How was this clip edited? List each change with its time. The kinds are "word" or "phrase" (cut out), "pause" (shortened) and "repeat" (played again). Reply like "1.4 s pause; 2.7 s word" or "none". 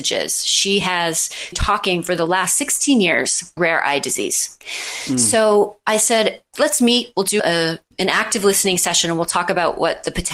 1.5 s word; 3.6 s word; 4.6 s pause; 6.5 s word; 7.4 s word